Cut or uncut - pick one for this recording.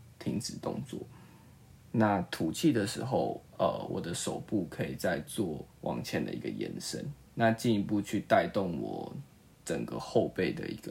cut